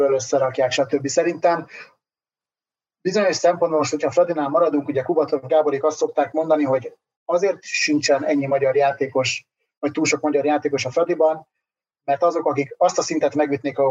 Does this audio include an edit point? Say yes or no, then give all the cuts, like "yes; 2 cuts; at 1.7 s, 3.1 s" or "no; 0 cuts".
no; 0 cuts